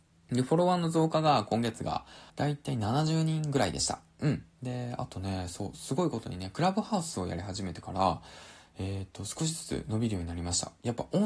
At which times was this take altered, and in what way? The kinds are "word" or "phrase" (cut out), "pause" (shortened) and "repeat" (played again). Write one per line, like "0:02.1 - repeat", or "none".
0:02.3 - pause
0:04.5 - pause